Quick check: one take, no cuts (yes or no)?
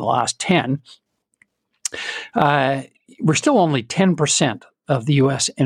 yes